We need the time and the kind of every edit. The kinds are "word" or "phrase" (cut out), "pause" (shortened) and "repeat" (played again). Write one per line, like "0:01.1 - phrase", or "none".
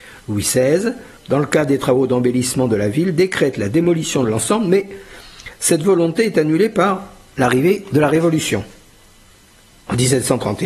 none